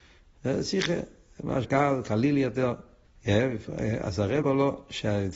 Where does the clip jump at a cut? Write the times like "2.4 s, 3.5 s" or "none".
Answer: 1.6 s, 3.1 s, 4.4 s

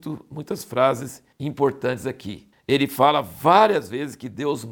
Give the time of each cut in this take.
1.3 s, 2.5 s

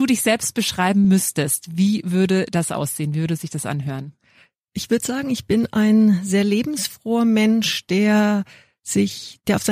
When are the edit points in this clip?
none

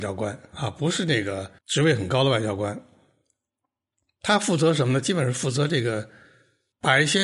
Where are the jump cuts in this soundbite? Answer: 1.6 s

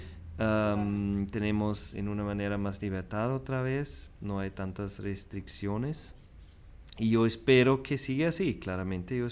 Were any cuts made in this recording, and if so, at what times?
none

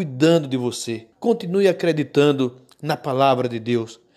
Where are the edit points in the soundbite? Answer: 1.1 s

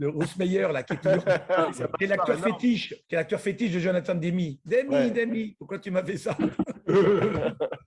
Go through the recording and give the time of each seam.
3.0 s

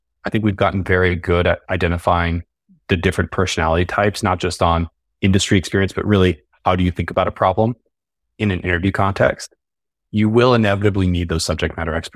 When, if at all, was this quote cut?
none

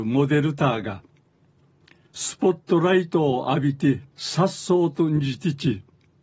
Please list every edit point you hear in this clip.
4.1 s

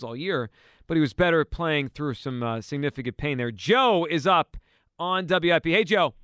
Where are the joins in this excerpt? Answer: none

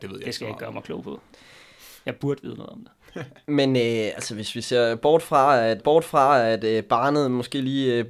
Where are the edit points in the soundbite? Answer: 5.8 s

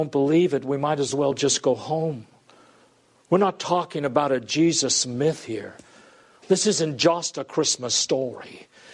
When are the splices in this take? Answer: none

